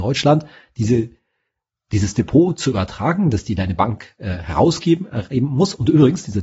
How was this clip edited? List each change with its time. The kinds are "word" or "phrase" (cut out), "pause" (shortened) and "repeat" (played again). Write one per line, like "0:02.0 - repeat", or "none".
none